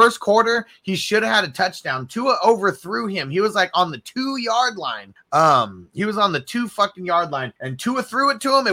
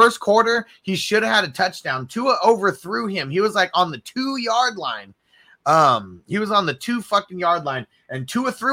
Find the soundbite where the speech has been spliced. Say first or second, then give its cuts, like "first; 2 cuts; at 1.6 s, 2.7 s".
first; 2 cuts; at 5.2 s, 7.6 s